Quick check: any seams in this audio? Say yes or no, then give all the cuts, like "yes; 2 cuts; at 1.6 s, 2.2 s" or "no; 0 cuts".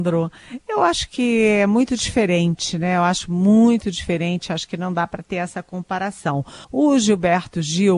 yes; 1 cut; at 6.6 s